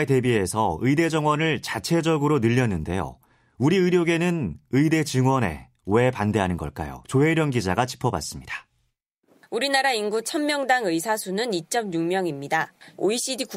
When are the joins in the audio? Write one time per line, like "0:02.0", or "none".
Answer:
none